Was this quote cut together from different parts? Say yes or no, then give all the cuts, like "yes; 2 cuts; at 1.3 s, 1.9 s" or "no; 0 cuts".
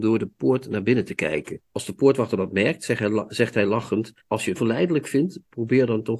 yes; 3 cuts; at 1.6 s, 4.2 s, 4.6 s